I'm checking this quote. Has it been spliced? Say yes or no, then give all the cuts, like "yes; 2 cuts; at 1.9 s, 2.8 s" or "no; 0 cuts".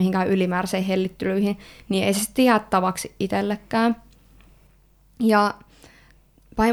no; 0 cuts